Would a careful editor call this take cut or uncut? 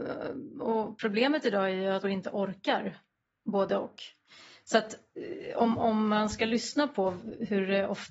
cut